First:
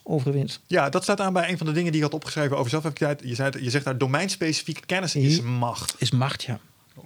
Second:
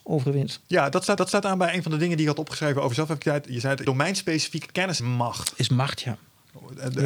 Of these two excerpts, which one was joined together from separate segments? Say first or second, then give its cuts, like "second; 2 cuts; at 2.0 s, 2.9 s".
second; 3 cuts; at 1.2 s, 3.8 s, 5.0 s